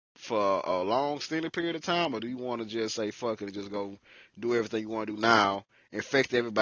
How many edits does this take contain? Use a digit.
0